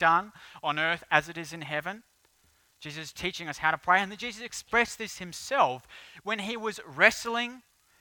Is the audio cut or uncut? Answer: uncut